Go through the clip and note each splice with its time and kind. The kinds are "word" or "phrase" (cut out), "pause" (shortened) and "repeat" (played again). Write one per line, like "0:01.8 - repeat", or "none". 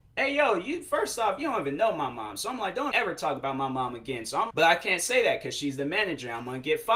0:02.9 - word
0:04.5 - word